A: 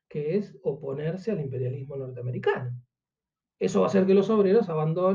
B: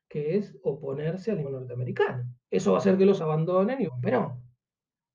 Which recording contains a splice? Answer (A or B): B